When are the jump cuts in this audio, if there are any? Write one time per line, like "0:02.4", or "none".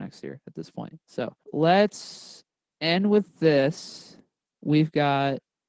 none